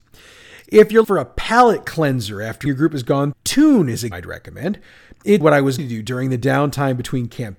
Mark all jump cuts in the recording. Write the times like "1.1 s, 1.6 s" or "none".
1.0 s, 2.7 s, 3.3 s, 4.1 s, 5.4 s, 5.8 s